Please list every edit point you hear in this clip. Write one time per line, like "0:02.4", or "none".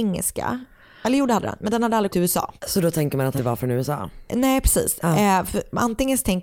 0:02.1
0:02.6
0:03.4